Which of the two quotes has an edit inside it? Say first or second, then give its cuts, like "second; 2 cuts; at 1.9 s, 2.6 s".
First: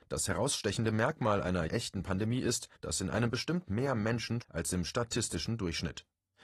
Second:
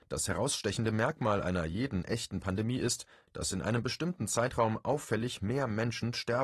first; 4 cuts; at 1.7 s, 2.7 s, 3.7 s, 4.4 s